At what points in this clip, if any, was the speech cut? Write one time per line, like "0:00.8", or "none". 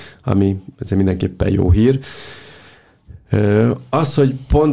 none

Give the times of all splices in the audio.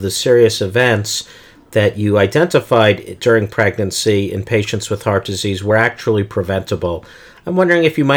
none

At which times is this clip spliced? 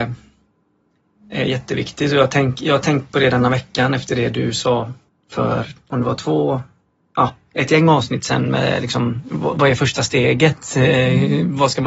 0:05.1

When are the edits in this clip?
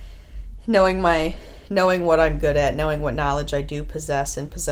none

